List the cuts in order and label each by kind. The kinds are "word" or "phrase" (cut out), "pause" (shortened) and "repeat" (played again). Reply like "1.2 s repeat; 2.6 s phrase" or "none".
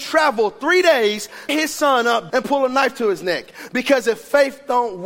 1.5 s word; 2.3 s phrase